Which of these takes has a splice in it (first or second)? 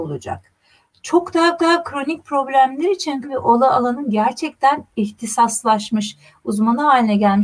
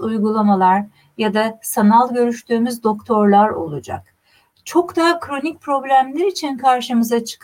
first